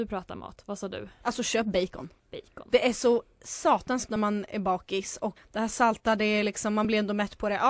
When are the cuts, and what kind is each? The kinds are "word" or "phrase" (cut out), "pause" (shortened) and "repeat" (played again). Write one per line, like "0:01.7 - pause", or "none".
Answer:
0:02.2 - pause
0:04.1 - word
0:05.4 - word